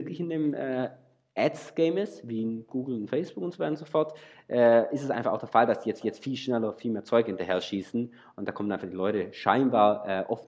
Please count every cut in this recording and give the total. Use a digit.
1